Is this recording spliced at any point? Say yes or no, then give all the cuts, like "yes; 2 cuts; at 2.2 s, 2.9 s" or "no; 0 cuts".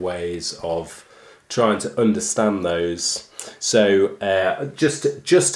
no; 0 cuts